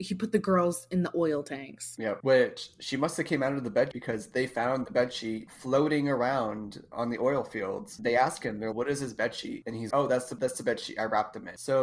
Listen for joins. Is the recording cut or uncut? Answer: cut